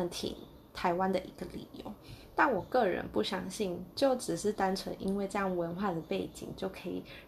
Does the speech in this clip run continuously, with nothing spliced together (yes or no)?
yes